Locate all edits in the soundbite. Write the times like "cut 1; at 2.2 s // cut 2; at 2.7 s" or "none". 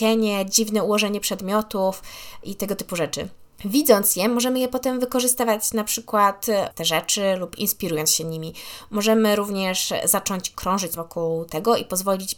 cut 1; at 3.5 s // cut 2; at 6.7 s // cut 3; at 11.0 s